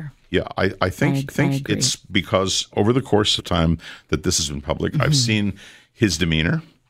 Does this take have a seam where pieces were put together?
yes; 3 cuts; at 1.3 s, 2.7 s, 3.4 s

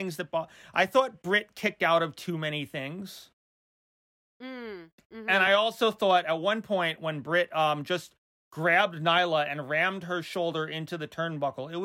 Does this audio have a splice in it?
no; 0 cuts

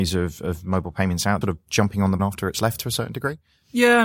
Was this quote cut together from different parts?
yes; 2 cuts; at 1.4 s, 2.2 s

